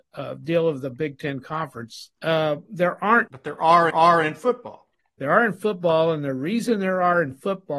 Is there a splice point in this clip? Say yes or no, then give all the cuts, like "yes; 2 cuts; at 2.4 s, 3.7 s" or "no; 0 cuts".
yes; 3 cuts; at 2.1 s, 3.3 s, 3.9 s